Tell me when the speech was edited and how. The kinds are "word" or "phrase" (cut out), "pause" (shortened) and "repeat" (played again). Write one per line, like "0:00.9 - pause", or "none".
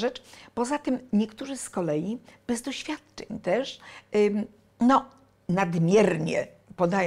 none